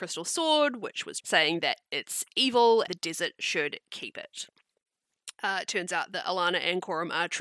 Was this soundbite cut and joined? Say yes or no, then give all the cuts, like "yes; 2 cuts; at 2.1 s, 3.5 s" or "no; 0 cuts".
yes; 3 cuts; at 1.2 s, 2.9 s, 5.3 s